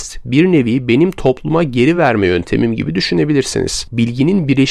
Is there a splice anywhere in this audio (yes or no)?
no